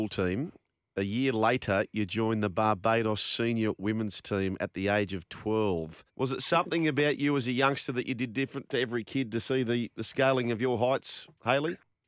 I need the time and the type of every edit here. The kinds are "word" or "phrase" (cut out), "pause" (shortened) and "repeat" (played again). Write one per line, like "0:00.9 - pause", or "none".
0:06.1 - pause